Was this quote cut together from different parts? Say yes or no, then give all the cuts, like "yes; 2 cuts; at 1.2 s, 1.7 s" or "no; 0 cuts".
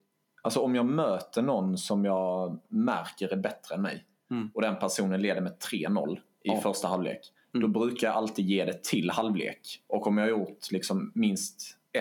no; 0 cuts